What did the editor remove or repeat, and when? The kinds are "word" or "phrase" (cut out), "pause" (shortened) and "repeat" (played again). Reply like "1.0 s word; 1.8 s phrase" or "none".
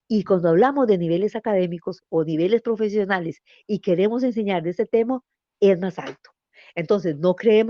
none